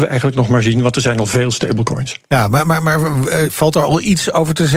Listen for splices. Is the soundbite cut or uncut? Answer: uncut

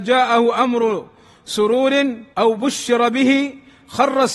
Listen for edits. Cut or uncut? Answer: cut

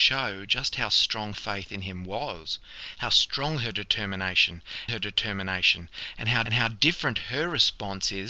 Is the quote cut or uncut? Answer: cut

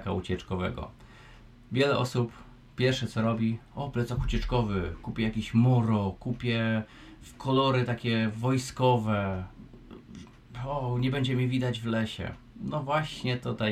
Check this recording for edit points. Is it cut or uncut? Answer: uncut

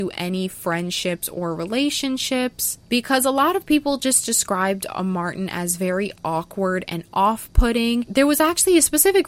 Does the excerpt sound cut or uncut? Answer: uncut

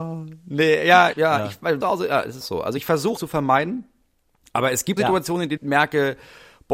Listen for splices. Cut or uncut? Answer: cut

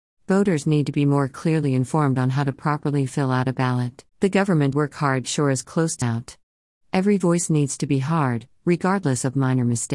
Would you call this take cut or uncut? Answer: cut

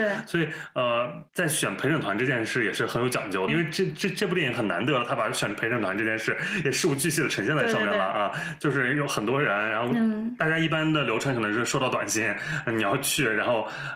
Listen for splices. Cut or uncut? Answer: cut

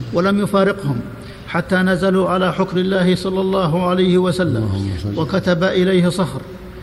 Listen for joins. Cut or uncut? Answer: cut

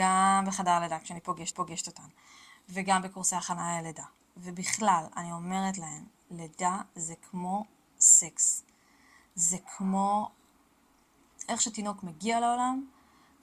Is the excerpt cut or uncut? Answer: cut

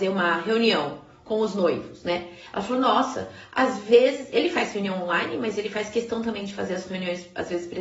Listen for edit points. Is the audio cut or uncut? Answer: uncut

